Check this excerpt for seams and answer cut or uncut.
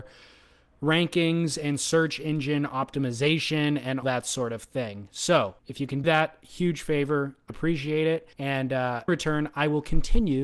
cut